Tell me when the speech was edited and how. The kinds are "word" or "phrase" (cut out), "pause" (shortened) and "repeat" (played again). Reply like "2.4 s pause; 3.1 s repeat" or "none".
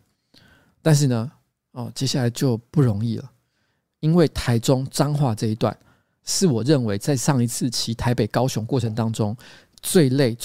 none